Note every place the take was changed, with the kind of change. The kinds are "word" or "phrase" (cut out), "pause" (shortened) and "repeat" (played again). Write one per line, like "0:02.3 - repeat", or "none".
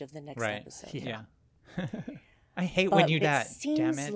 0:03.2 - word